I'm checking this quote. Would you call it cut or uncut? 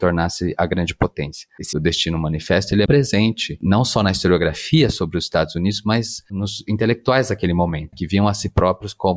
cut